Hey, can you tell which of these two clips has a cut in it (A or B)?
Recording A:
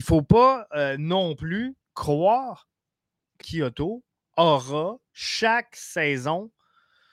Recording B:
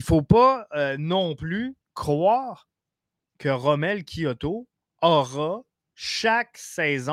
A